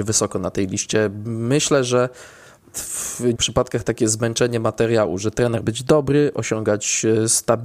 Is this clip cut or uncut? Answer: cut